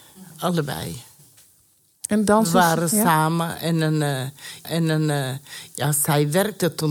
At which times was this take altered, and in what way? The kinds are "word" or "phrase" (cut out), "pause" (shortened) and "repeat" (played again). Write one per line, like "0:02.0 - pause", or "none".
0:04.6 - repeat

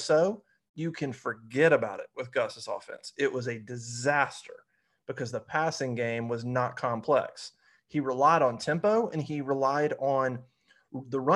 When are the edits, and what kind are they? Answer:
none

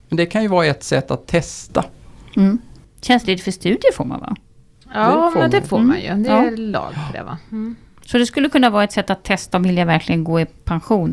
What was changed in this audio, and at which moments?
none

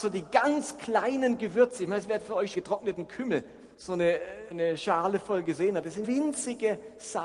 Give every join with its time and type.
0:02.5 - word
0:03.7 - pause
0:04.5 - word
0:06.0 - word

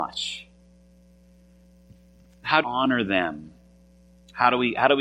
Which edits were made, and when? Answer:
0:02.6 - word

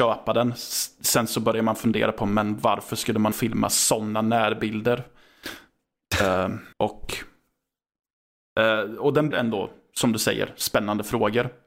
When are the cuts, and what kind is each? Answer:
0:03.3 - phrase
0:06.7 - pause
0:09.3 - word

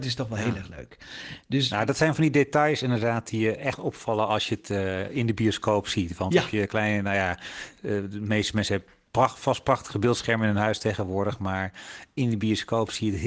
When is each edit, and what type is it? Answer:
none

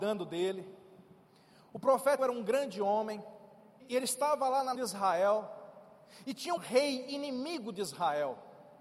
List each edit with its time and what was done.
0:02.2 - word
0:03.8 - word
0:04.7 - word
0:06.6 - word

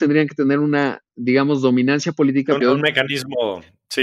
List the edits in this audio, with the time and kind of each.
0:02.6 - word

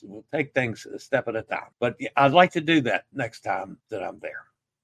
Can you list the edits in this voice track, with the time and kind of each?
0:01.7 - pause
0:03.8 - pause

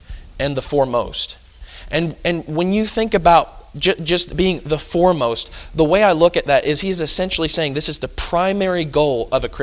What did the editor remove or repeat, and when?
none

